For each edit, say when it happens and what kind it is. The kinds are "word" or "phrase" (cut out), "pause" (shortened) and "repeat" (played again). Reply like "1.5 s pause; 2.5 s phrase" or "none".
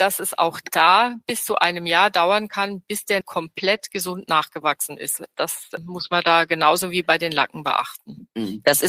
3.2 s word